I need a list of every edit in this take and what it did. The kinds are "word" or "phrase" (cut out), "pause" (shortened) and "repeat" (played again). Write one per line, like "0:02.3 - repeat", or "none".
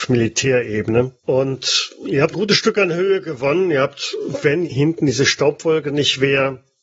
0:01.2 - pause
0:02.3 - word
0:04.6 - word